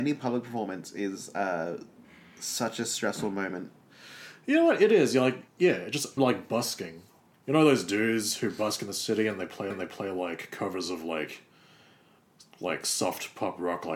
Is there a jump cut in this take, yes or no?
yes